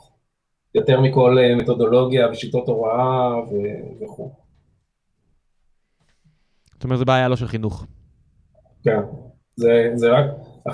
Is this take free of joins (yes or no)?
no